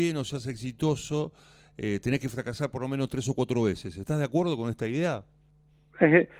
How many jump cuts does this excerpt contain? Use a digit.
0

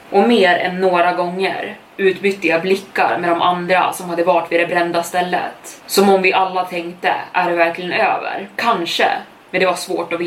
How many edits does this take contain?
0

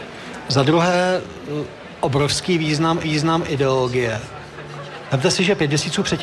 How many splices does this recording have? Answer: 1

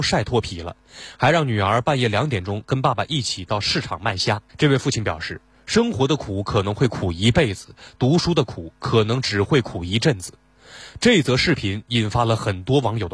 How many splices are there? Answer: 1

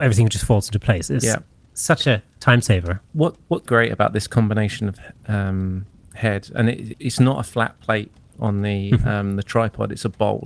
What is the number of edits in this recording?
2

